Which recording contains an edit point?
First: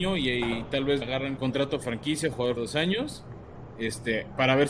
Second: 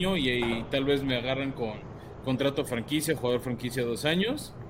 first; 3 cuts; at 1.0 s, 1.4 s, 2.6 s

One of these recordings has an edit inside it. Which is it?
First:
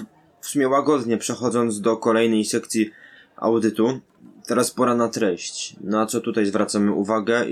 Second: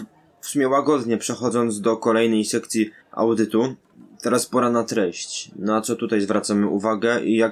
second; 1 cut; at 3.0 s

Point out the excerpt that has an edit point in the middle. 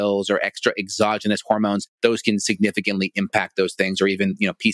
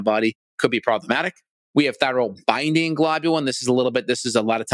first; 1 cut; at 1.9 s

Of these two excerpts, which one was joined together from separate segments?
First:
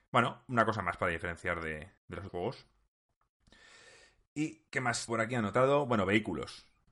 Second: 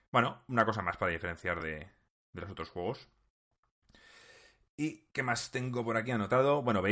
first; 3 cuts; at 2.0 s, 2.3 s, 5.1 s

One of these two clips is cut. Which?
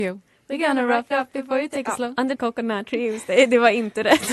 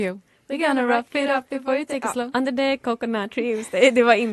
first; 2 cuts; at 1.1 s, 2.3 s

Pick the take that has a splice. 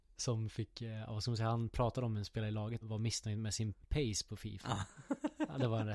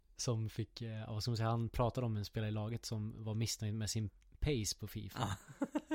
first; 2 cuts; at 2.8 s, 3.8 s

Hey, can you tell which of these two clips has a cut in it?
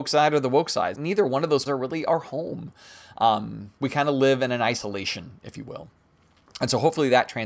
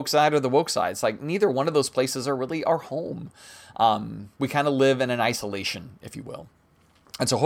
first; 2 cuts; at 0.9 s, 1.7 s

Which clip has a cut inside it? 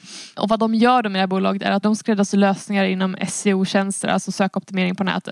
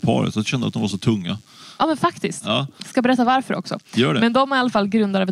first; 1 cut; at 1.8 s

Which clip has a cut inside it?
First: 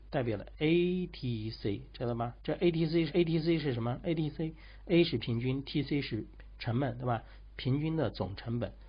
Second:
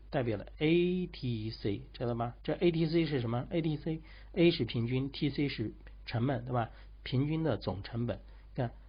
first; 1 cut; at 3.1 s

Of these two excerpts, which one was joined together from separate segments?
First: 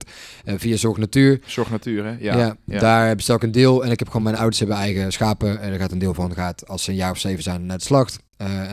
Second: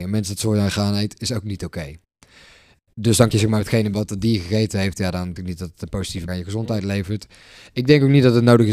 second; 4 cuts; at 3.3 s, 3.9 s, 5.4 s, 6.3 s

